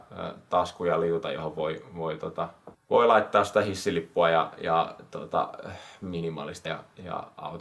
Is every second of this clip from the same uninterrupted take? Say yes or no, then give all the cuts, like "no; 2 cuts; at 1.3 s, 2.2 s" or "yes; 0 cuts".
no; 1 cut; at 6.6 s